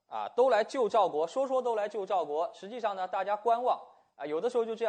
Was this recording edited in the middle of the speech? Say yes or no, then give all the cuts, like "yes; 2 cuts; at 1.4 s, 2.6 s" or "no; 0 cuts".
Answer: no; 0 cuts